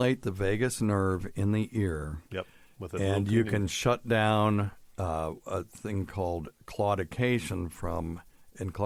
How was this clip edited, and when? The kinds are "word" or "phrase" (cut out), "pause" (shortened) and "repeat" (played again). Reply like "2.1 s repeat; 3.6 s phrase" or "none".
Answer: 2.3 s pause